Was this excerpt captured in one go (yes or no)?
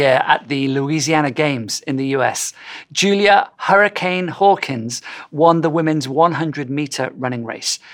yes